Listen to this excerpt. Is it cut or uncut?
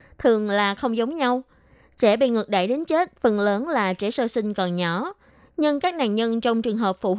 uncut